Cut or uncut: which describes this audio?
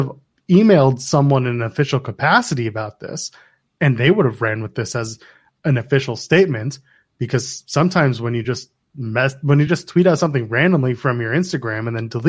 uncut